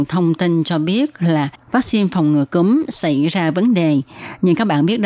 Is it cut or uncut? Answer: uncut